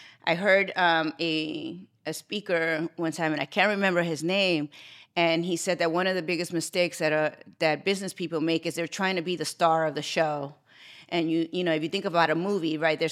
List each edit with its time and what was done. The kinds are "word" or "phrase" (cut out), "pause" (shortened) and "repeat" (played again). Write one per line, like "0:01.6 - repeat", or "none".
none